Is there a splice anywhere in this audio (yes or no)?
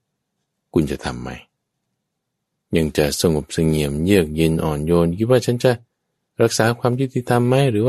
no